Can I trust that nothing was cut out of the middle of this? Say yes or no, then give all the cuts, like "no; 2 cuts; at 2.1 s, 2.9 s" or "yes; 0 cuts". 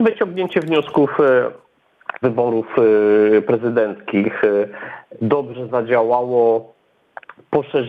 no; 2 cuts; at 2.2 s, 5.2 s